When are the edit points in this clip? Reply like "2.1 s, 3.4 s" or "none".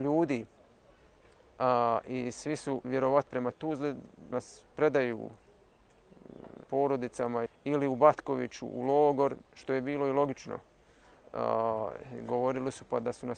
2.8 s, 3.3 s, 4.3 s, 6.6 s, 7.5 s